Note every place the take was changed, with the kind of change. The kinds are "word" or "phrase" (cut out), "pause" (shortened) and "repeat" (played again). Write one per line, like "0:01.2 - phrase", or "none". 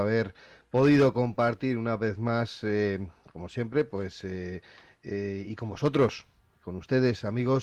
none